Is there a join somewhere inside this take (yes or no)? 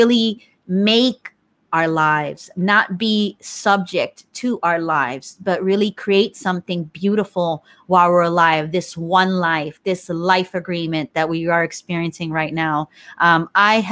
no